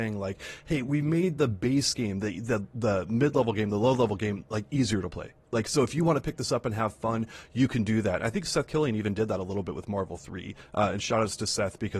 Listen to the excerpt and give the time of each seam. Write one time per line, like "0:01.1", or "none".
none